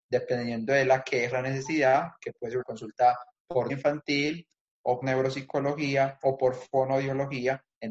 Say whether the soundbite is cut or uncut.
cut